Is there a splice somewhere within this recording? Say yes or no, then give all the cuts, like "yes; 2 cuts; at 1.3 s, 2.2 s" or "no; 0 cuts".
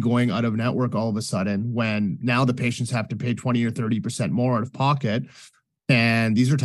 no; 0 cuts